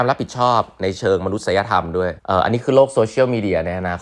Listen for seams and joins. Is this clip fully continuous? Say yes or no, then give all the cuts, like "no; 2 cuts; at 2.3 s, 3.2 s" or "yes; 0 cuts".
no; 1 cut; at 2.2 s